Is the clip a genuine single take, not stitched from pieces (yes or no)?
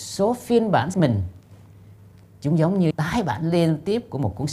no